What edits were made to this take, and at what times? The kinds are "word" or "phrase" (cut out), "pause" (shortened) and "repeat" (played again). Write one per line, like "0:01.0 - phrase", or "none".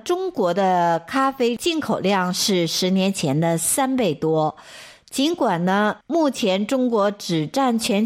0:06.0 - pause